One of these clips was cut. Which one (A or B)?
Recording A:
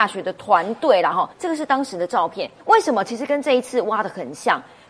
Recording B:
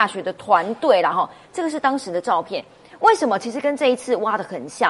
A